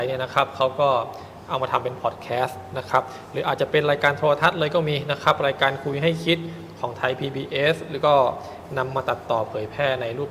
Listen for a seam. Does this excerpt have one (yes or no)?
no